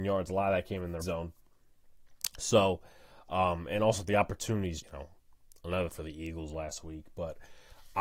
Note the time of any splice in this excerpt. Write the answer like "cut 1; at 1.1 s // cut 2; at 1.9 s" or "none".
cut 1; at 1.0 s // cut 2; at 4.8 s // cut 3; at 5.9 s